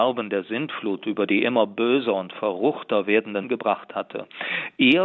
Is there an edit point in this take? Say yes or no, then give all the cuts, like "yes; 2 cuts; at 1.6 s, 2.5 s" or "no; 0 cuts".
yes; 1 cut; at 3.4 s